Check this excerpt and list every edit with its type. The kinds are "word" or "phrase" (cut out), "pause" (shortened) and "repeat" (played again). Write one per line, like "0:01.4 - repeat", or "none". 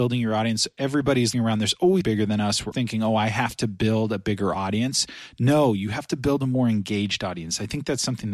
0:01.3 - word
0:02.0 - word
0:02.7 - word